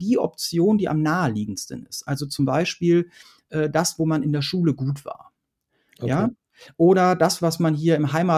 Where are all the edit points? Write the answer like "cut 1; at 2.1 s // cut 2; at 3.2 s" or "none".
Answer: none